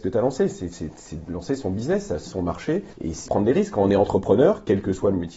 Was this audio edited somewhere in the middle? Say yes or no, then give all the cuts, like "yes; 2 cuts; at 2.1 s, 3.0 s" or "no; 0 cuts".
yes; 3 cuts; at 2.3 s, 2.9 s, 3.3 s